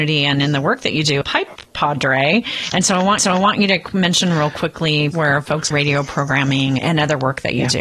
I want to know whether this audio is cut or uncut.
cut